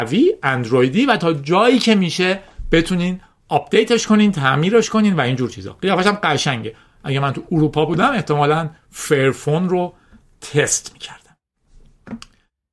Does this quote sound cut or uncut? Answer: uncut